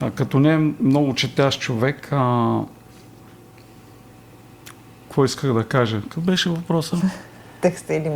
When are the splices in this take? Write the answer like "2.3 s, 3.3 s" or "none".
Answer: none